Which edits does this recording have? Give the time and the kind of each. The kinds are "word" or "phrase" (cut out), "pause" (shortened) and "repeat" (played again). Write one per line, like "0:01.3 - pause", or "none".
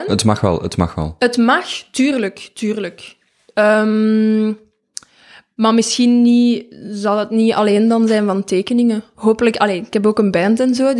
none